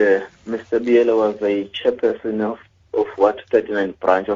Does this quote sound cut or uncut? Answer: uncut